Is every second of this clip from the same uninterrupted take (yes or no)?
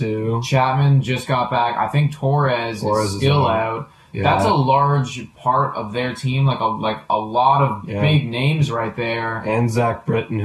yes